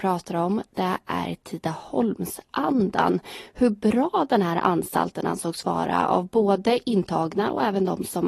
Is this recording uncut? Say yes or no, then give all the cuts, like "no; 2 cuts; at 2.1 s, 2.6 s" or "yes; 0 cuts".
yes; 0 cuts